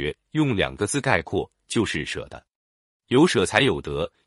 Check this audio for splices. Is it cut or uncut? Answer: uncut